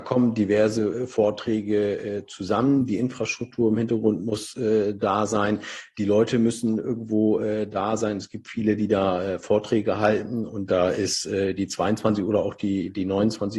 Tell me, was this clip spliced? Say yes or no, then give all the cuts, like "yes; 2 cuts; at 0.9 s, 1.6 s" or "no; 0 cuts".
no; 0 cuts